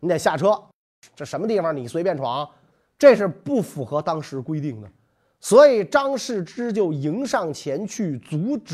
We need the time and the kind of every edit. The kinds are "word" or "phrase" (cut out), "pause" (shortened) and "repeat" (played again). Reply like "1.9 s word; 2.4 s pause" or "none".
none